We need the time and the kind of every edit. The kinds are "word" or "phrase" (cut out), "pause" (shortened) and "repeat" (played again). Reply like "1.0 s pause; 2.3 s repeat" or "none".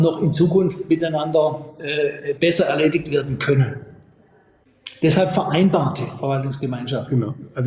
none